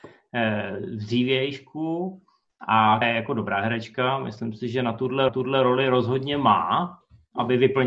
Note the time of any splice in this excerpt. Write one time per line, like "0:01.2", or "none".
0:03.0
0:05.3

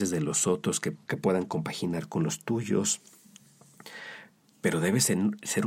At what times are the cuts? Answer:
0:00.9

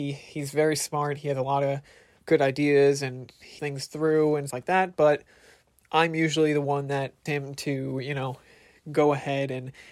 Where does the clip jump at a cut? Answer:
0:02.2
0:03.6
0:04.5
0:07.3

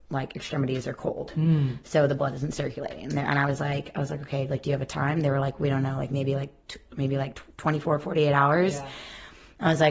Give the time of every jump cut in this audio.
0:07.5

